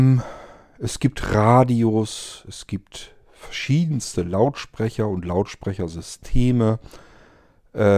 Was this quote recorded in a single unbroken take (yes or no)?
yes